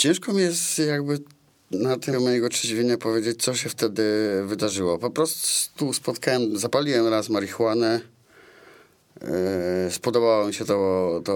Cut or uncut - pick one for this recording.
cut